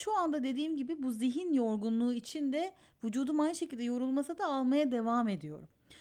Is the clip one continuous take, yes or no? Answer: yes